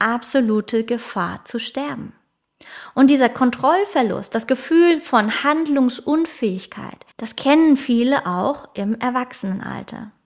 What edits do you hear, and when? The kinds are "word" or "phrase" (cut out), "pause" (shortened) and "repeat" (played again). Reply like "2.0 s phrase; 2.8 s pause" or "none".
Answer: 7.1 s pause